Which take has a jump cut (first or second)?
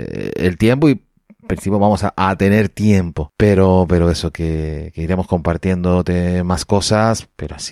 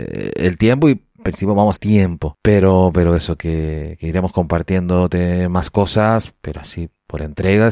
second